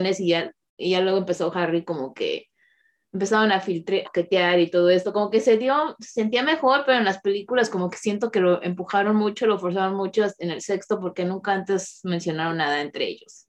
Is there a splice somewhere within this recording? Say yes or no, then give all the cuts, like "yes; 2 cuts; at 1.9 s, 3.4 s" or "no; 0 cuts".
yes; 1 cut; at 4.0 s